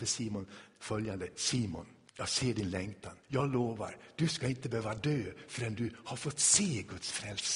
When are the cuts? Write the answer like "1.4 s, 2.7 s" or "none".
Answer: 2.1 s, 3.2 s